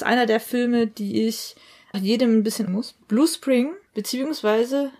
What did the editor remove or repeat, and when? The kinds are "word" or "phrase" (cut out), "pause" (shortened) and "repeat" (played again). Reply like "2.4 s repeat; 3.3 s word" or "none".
1.9 s word; 2.7 s word; 3.0 s pause; 3.9 s pause